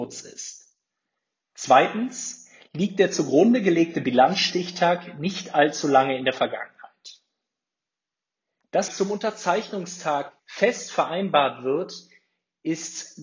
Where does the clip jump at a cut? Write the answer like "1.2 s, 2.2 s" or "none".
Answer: 8.9 s, 10.4 s